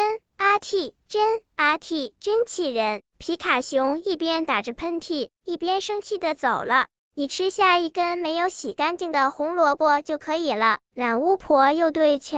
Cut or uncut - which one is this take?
cut